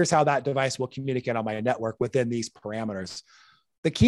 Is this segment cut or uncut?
uncut